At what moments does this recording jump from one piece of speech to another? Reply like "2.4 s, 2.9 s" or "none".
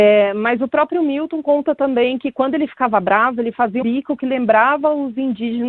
3.8 s